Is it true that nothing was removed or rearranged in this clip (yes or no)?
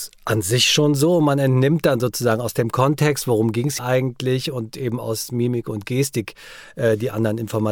no